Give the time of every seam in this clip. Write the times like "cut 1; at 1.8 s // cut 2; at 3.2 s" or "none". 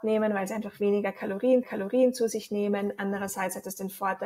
cut 1; at 1.6 s